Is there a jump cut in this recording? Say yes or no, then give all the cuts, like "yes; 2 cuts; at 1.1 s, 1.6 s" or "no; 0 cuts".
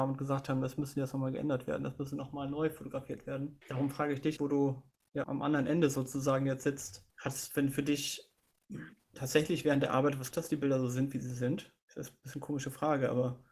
yes; 6 cuts; at 3.6 s, 4.4 s, 5.2 s, 7.1 s, 9.1 s, 10.3 s